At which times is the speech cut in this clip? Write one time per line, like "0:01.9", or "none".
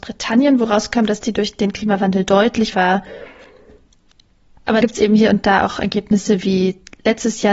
0:02.7
0:04.8